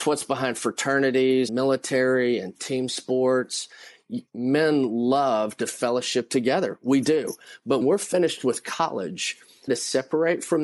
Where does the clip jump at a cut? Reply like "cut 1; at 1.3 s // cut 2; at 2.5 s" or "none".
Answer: cut 1; at 1.5 s // cut 2; at 4.3 s // cut 3; at 7.8 s // cut 4; at 9.7 s

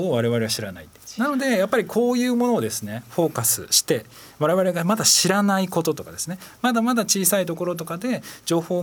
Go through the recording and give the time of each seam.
none

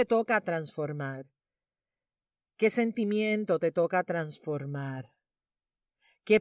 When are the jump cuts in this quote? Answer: none

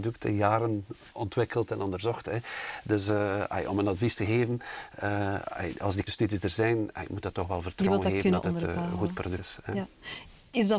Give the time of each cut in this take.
cut 1; at 6.1 s // cut 2; at 9.4 s

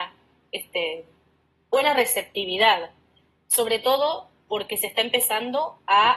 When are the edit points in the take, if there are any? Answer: none

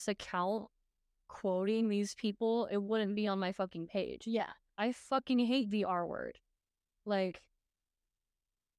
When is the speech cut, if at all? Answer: none

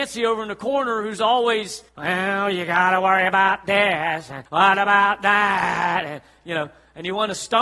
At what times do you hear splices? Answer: cut 1; at 1.9 s // cut 2; at 4.5 s

